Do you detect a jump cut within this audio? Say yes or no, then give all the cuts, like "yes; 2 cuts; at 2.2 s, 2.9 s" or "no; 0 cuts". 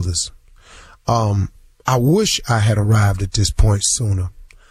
no; 0 cuts